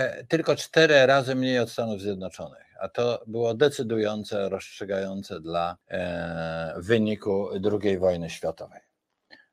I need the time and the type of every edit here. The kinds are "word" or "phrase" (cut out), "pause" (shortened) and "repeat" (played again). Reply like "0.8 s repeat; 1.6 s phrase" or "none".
5.8 s pause